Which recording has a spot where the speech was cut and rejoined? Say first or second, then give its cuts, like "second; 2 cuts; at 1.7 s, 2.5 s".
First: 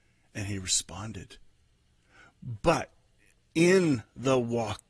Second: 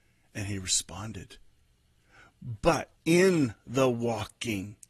second; 1 cut; at 3.0 s